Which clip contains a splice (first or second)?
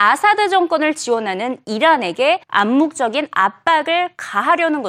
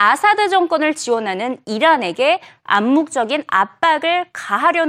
first